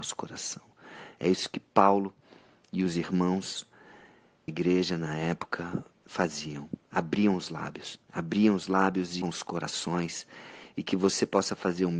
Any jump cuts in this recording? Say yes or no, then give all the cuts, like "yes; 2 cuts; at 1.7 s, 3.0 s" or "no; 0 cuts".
yes; 4 cuts; at 4.5 s, 5.9 s, 8.0 s, 9.2 s